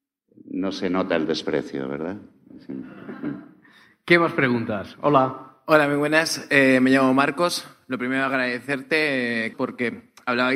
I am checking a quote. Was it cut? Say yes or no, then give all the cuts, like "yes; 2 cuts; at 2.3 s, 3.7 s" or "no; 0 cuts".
yes; 1 cut; at 9.5 s